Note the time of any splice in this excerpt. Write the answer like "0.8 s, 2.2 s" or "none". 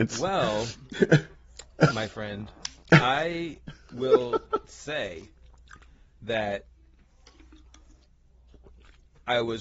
1.9 s